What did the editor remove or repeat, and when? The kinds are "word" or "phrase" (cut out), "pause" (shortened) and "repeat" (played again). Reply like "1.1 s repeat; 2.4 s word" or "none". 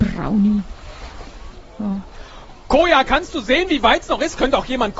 none

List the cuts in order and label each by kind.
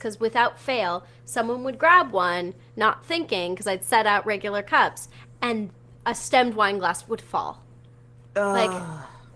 8.3 s pause

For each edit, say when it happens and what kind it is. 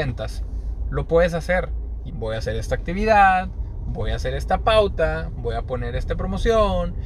2.1 s word

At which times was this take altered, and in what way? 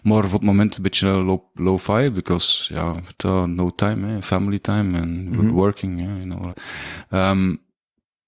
6.5 s word

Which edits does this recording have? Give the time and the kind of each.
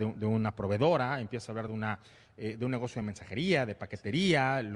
none

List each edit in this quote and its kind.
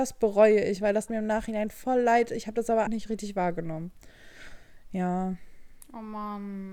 1.1 s word; 2.9 s phrase

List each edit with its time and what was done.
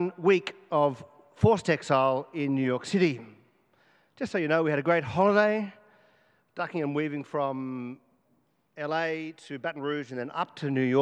none

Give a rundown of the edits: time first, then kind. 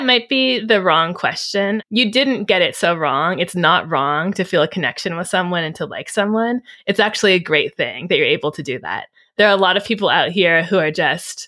none

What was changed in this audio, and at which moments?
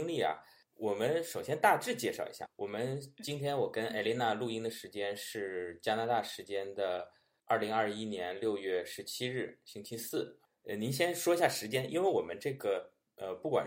none

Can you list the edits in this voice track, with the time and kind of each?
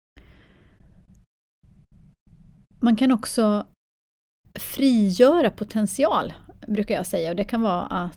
none

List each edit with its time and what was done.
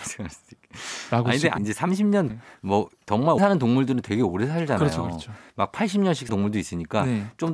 1.6 s word; 2.3 s word; 3.4 s word; 6.3 s word

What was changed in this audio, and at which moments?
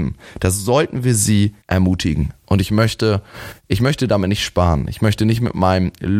1.6 s pause

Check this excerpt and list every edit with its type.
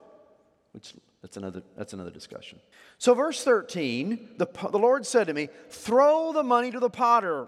2.7 s pause

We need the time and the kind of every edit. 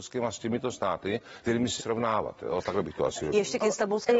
1.4 s word; 1.8 s word

